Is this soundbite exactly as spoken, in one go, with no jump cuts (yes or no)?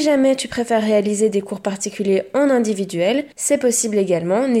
no